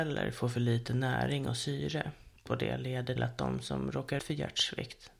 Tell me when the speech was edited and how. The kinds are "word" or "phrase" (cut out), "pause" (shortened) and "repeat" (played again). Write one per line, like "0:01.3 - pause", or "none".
0:02.5 - word
0:03.2 - word
0:04.2 - word